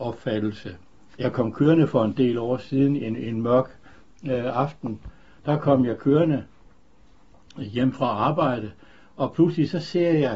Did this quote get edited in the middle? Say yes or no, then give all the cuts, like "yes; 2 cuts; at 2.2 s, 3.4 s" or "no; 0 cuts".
no; 0 cuts